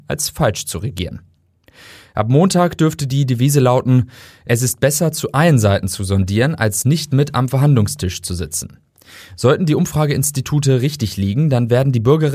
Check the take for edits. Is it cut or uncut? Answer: uncut